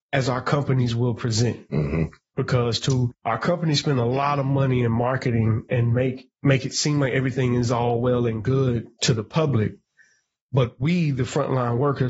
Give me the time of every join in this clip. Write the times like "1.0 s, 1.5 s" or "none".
none

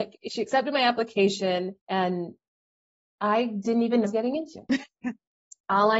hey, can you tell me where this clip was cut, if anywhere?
1.8 s, 4.0 s

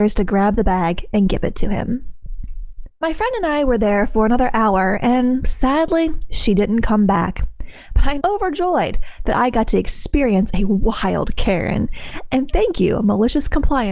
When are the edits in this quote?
2.9 s, 8.2 s

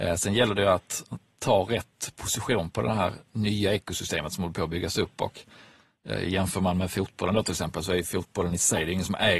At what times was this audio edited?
none

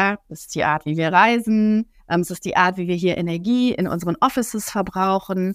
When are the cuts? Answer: 2.0 s

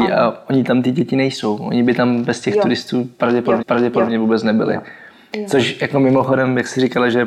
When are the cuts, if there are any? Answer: 3.6 s

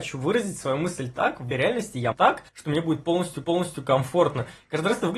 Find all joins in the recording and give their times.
1.5 s, 2.1 s, 2.5 s, 3.4 s

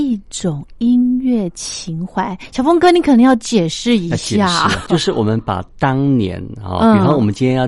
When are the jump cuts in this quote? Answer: 4.9 s

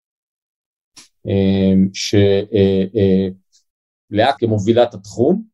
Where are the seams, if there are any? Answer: 4.4 s

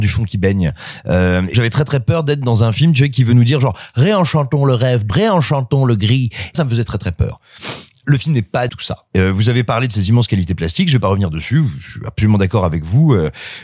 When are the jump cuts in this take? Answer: 1.5 s, 5.1 s, 6.5 s, 8.7 s

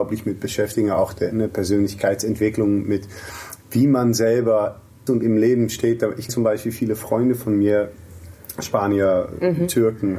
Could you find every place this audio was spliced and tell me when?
5.1 s, 6.3 s

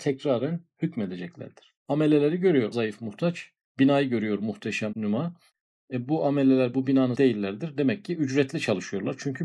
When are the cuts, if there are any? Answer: 1.8 s, 2.7 s, 3.6 s, 4.9 s, 7.1 s

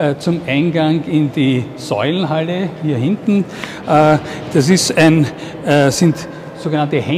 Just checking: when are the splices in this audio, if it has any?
none

